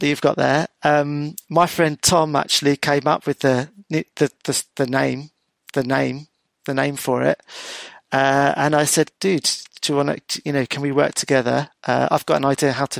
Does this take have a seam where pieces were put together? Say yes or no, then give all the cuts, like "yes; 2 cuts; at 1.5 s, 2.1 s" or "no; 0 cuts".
yes; 3 cuts; at 5.7 s, 9.2 s, 11.8 s